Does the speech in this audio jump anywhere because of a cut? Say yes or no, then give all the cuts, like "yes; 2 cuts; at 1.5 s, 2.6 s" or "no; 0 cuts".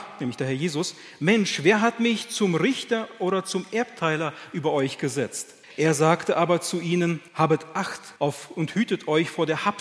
yes; 3 cuts; at 5.6 s, 7.3 s, 8.2 s